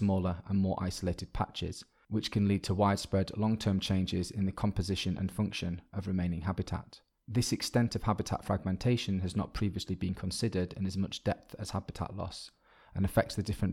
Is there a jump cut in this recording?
no; 0 cuts

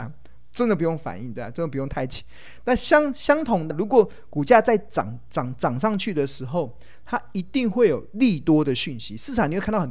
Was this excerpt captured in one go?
no; 1 cut; at 3.7 s

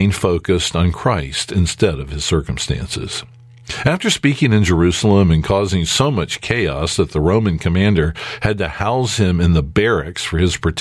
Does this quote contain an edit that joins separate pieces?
no; 0 cuts

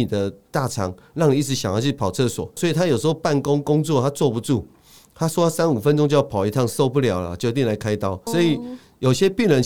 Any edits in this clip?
yes; 2 cuts; at 2.6 s, 8.3 s

